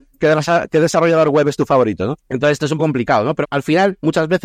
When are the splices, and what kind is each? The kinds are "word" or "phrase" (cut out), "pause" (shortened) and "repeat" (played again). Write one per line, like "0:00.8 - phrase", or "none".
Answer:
0:02.8 - word
0:03.4 - word